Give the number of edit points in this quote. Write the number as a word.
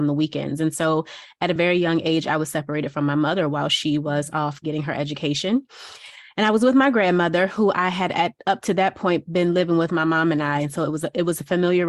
zero